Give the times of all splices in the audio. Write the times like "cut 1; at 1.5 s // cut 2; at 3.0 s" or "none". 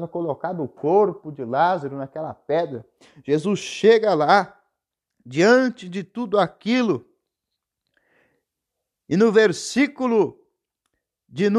none